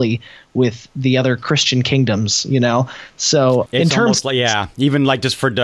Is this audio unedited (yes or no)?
no